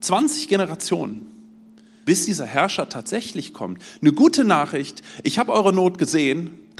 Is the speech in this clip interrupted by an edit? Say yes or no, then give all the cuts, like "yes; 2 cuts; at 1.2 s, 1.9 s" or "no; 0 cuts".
yes; 1 cut; at 2.0 s